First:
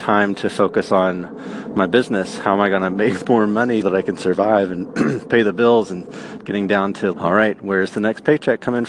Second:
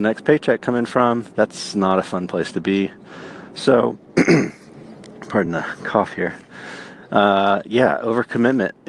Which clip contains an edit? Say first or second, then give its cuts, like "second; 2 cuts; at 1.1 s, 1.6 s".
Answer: first; 3 cuts; at 3.8 s, 6.4 s, 7.1 s